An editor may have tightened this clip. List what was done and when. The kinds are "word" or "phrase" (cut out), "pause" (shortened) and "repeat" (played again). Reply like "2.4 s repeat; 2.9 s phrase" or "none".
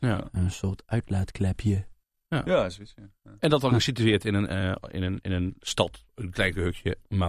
none